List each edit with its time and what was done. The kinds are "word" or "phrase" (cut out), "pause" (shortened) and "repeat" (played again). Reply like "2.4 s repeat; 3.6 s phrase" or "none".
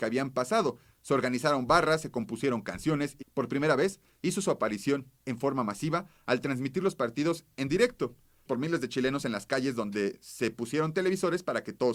3.2 s phrase; 5.2 s pause; 8.5 s phrase